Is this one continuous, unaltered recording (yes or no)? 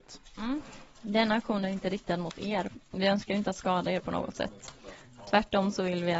yes